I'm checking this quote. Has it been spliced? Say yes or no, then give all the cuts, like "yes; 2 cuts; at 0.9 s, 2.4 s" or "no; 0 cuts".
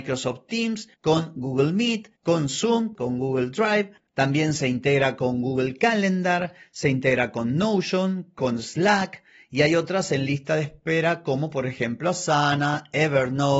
no; 0 cuts